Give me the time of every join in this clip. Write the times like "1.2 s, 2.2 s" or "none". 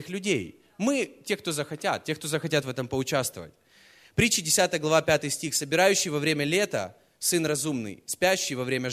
none